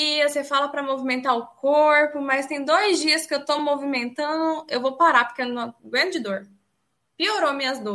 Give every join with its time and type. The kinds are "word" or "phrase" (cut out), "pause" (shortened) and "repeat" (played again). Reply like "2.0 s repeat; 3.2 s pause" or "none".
none